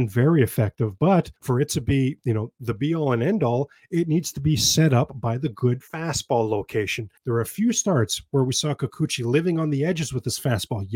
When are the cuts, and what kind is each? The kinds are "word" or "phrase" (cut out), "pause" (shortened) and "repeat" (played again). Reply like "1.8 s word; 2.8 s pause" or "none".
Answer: 1.4 s pause; 5.9 s pause; 7.2 s pause